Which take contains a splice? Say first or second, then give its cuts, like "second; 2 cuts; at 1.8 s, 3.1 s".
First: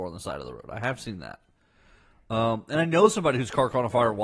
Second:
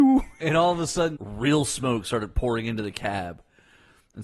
second; 1 cut; at 1.2 s